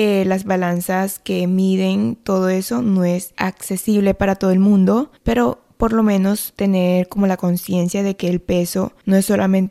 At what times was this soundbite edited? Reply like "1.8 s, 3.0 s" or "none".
5.2 s